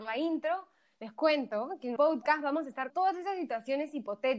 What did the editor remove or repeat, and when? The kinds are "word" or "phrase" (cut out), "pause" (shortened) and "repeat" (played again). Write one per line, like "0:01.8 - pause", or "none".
0:02.0 - word
0:02.9 - word